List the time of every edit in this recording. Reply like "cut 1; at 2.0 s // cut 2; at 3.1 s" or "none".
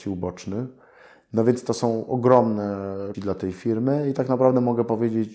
cut 1; at 3.1 s